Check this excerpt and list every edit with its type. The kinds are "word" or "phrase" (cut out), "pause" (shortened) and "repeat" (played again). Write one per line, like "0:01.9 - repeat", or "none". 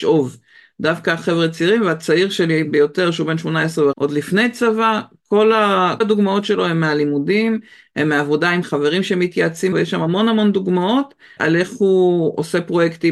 0:03.9 - word
0:06.0 - word
0:08.6 - word
0:09.7 - word
0:11.4 - word